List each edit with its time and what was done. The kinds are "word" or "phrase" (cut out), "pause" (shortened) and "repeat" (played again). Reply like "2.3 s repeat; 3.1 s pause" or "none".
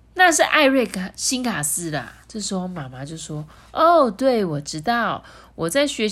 2.2 s pause